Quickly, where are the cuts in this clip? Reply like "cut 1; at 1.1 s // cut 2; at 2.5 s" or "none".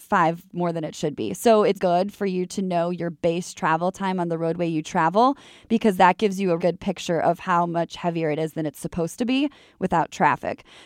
cut 1; at 1.8 s // cut 2; at 6.6 s

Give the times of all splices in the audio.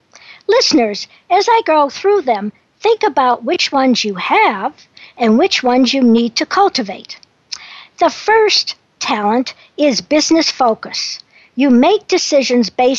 none

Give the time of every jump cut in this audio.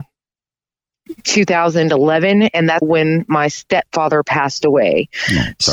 cut 1; at 2.8 s

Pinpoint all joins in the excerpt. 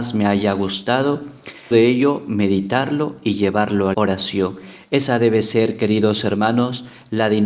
cut 1; at 1.7 s // cut 2; at 3.9 s

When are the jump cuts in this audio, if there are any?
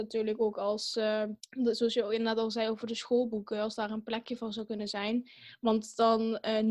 cut 1; at 1.4 s

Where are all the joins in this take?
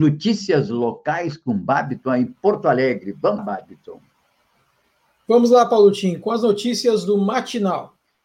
cut 1; at 3.4 s

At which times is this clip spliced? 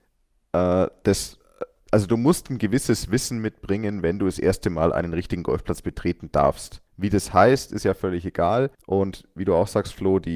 cut 1; at 6.9 s // cut 2; at 8.7 s

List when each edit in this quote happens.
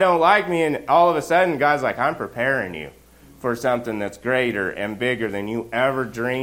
none

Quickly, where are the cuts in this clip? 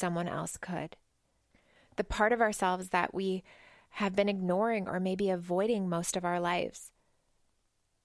none

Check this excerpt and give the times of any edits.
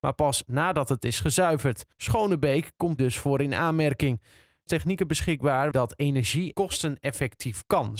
cut 1; at 1.9 s // cut 2; at 3.0 s // cut 3; at 4.7 s // cut 4; at 5.7 s // cut 5; at 6.5 s

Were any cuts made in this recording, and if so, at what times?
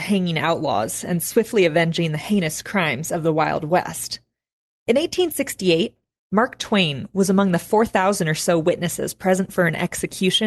none

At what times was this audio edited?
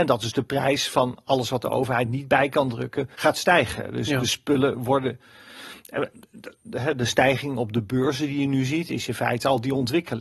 cut 1; at 3.1 s

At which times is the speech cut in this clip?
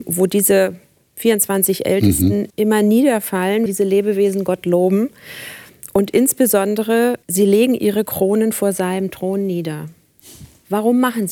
cut 1; at 2.5 s // cut 2; at 3.7 s // cut 3; at 7.2 s

